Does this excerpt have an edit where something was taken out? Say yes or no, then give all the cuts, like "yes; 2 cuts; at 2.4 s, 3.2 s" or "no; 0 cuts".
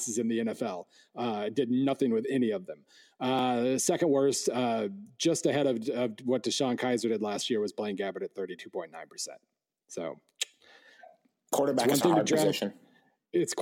no; 0 cuts